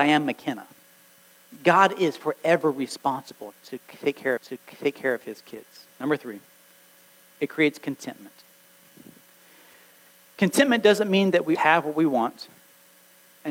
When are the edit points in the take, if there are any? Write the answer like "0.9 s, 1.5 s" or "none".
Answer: 4.4 s, 5.9 s, 11.5 s